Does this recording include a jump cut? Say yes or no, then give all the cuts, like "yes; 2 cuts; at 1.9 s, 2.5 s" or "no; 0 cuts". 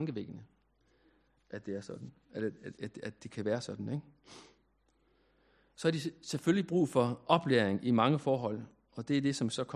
no; 0 cuts